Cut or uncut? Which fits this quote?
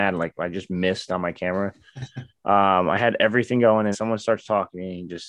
cut